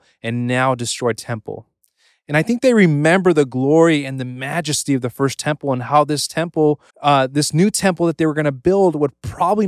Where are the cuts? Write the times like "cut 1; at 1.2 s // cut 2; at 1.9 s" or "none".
cut 1; at 6.9 s